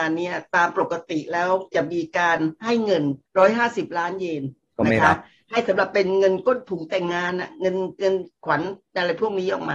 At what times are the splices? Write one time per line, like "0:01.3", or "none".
0:03.3